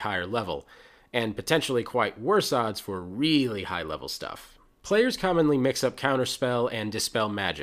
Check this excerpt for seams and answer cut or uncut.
uncut